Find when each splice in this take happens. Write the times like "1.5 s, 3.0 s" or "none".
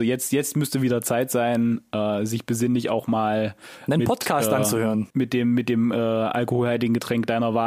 5.1 s